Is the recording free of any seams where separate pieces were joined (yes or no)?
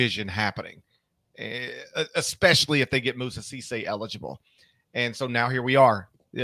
yes